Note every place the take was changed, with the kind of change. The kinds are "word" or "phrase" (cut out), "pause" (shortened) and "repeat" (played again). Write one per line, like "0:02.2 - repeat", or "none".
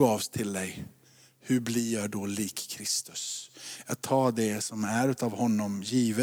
none